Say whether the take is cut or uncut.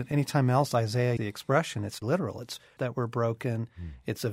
cut